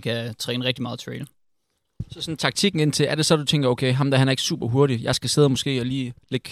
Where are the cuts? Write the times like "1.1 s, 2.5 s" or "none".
none